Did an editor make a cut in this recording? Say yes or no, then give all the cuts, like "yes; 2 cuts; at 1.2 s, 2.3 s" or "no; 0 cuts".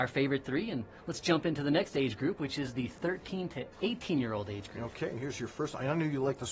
no; 0 cuts